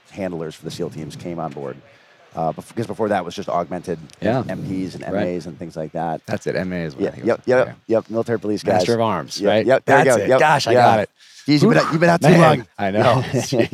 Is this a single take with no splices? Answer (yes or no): yes